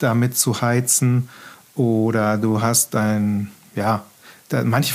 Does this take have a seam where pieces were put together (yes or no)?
no